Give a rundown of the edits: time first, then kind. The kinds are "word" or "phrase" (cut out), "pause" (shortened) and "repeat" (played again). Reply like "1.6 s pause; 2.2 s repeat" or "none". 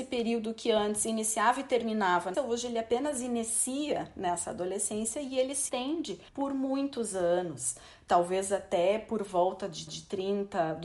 2.3 s word; 5.7 s word; 6.3 s pause; 9.9 s repeat